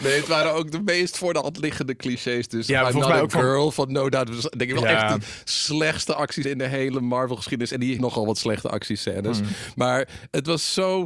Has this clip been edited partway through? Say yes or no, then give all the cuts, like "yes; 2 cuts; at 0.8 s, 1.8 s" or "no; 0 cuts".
yes; 2 cuts; at 6.4 s, 8.0 s